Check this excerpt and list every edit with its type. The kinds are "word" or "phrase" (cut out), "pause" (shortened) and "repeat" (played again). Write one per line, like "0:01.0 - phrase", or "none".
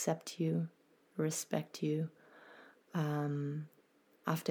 none